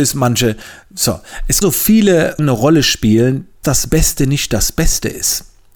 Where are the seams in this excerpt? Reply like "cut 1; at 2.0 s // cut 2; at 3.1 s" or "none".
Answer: cut 1; at 1.6 s // cut 2; at 2.4 s // cut 3; at 3.6 s